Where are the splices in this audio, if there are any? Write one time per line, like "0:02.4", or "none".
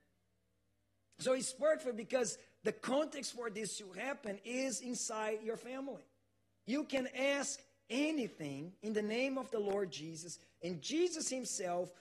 none